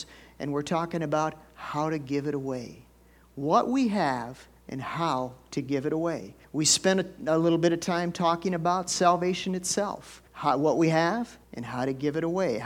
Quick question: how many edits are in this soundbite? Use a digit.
4